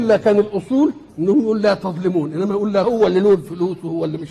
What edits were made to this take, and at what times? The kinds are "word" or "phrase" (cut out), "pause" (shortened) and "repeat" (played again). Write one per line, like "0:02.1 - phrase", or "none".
0:01.1 - pause
0:02.8 - phrase